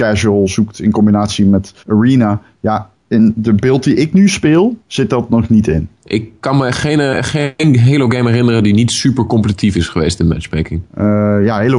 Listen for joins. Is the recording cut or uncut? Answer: cut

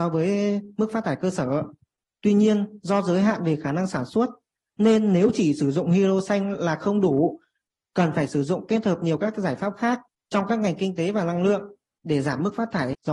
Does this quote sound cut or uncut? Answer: uncut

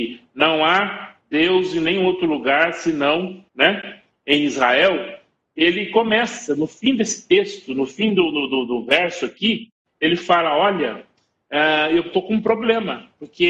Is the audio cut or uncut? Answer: cut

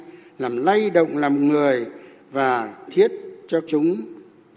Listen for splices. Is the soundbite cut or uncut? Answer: cut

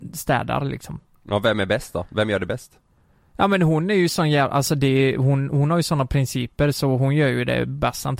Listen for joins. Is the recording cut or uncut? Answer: uncut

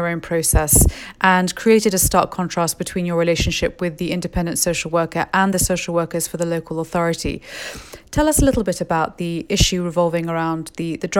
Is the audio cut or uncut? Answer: uncut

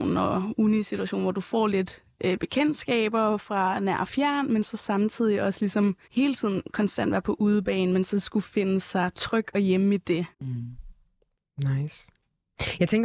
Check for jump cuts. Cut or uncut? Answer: cut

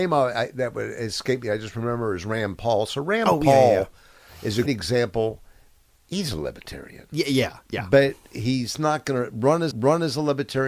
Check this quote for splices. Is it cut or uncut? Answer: cut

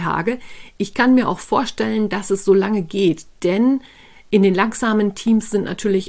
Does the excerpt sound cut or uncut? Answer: uncut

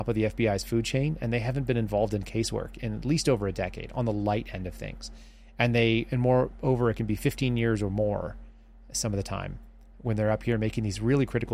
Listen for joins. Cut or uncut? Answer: uncut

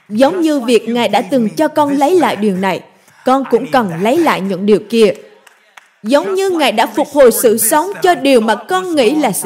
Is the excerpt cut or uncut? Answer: uncut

